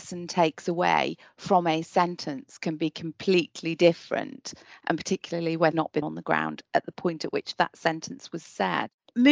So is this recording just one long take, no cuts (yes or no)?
no